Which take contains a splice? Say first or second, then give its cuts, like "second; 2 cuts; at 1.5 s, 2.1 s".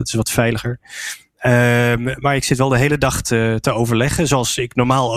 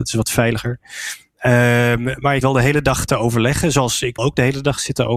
second; 3 cuts; at 2.4 s, 3.1 s, 4.2 s